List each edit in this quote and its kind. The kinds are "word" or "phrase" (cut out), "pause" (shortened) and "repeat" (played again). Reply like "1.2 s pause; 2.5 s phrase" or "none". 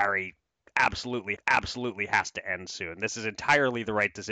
1.4 s repeat

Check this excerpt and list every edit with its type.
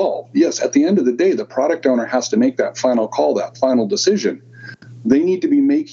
none

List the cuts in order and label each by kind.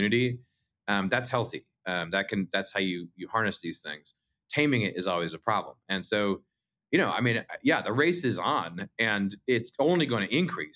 none

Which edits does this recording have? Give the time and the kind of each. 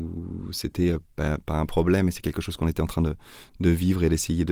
none

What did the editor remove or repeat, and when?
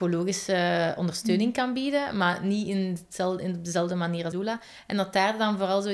4.3 s word

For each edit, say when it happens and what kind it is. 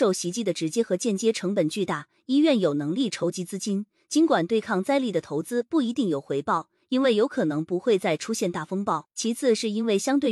9.1 s pause

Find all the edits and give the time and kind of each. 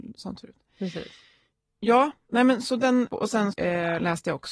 2.6 s word; 3.1 s word; 3.5 s word

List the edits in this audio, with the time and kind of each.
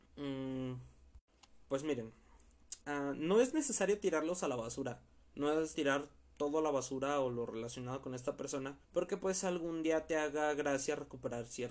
1.7 s word; 2.8 s pause; 5.2 s pause; 5.7 s word; 8.8 s pause

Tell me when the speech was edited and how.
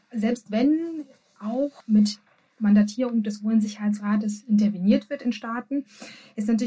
1.8 s pause

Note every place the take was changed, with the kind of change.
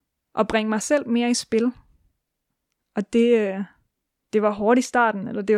none

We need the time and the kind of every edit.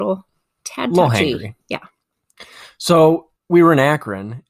1.6 s pause; 3.4 s pause

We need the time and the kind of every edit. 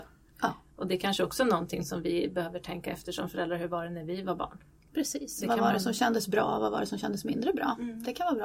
none

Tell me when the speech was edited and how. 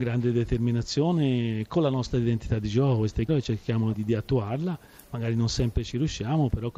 3.3 s word; 3.9 s word

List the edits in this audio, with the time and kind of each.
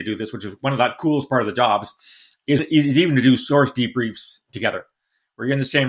2.6 s word

